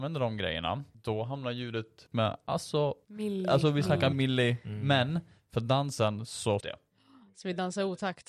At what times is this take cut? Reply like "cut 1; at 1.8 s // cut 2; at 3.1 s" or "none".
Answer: cut 1; at 2.1 s // cut 2; at 3.0 s // cut 3; at 4.1 s // cut 4; at 6.6 s